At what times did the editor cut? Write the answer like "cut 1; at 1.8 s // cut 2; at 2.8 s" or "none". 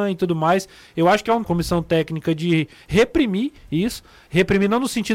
cut 1; at 1.4 s